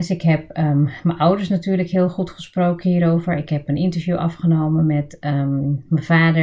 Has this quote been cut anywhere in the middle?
no; 0 cuts

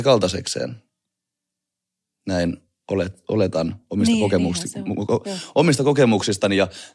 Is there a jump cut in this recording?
no; 0 cuts

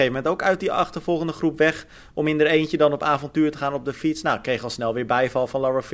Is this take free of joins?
yes; 0 cuts

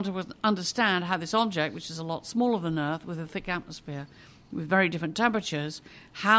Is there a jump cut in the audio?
no; 0 cuts

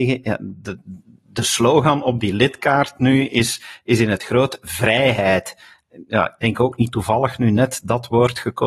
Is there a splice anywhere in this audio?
no; 0 cuts

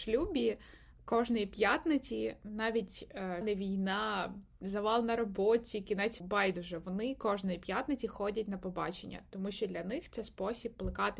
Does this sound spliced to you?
yes; 2 cuts; at 3.4 s, 6.2 s

